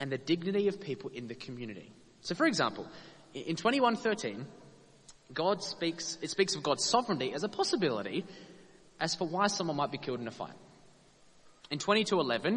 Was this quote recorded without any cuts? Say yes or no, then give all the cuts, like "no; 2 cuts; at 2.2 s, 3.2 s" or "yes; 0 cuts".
yes; 0 cuts